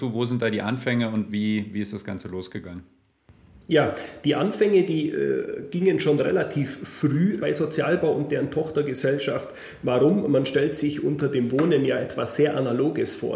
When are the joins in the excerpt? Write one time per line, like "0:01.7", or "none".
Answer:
0:07.4